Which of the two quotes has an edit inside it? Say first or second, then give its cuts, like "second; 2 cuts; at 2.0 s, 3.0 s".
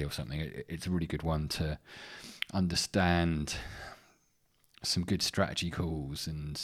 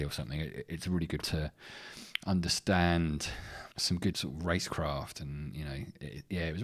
second; 3 cuts; at 1.2 s, 3.7 s, 4.1 s